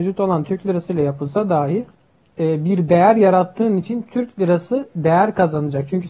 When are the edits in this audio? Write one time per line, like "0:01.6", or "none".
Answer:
0:01.9